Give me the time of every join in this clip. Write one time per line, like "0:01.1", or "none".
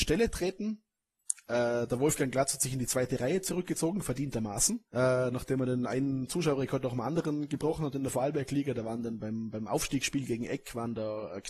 0:04.9